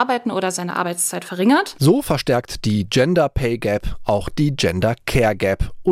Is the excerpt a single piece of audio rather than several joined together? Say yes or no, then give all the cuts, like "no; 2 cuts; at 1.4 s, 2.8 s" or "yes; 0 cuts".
yes; 0 cuts